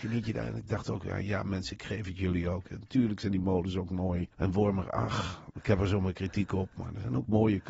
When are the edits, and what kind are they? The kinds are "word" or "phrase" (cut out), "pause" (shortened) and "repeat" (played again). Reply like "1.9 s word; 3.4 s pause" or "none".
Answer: 4.3 s pause